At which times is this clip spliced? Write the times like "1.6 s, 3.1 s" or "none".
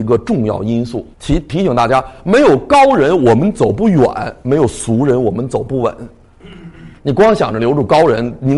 1.1 s, 7.0 s